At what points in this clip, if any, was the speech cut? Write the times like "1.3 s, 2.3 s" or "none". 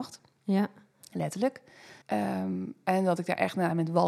2.0 s